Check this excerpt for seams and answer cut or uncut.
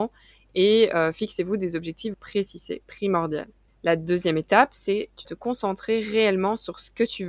cut